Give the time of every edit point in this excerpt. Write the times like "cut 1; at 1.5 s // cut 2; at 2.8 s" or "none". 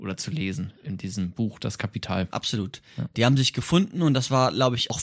none